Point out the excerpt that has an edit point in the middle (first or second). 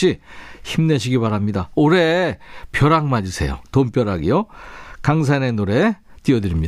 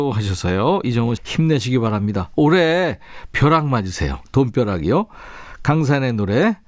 second